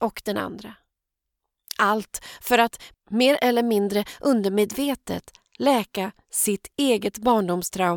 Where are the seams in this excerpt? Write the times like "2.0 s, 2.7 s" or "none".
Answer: none